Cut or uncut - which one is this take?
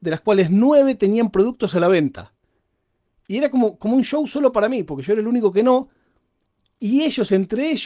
uncut